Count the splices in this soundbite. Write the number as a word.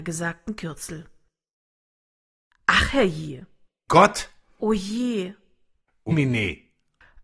two